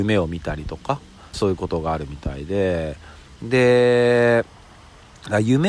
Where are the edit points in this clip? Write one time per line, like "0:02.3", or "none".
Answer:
0:01.3